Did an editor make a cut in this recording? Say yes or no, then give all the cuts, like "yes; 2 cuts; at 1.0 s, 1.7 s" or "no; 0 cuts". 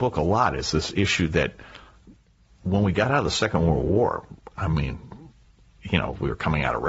no; 0 cuts